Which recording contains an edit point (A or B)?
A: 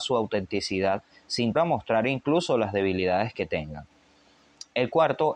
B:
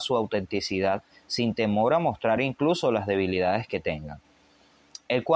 A